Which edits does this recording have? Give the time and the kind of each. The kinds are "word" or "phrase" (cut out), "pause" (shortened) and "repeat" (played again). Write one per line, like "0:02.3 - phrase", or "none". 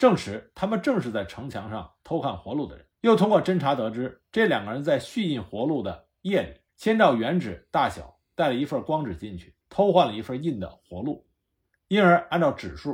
0:02.9 - pause
0:06.7 - pause
0:09.6 - pause